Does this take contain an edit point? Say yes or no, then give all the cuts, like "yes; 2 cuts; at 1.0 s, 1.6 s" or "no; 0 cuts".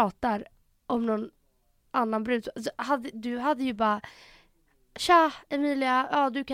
no; 0 cuts